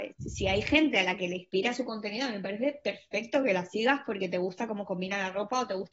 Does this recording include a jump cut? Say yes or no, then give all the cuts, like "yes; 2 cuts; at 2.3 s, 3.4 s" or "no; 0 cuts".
no; 0 cuts